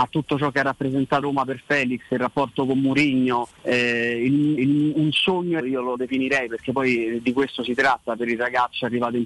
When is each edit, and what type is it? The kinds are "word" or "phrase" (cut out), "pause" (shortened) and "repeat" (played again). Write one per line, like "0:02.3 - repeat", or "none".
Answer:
0:01.2 - word
0:03.6 - pause
0:04.6 - repeat
0:05.6 - word
0:06.0 - word
0:08.2 - word